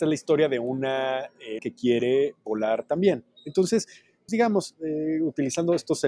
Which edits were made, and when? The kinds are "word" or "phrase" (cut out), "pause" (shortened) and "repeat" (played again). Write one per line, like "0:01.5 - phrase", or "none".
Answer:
0:01.6 - word
0:04.3 - word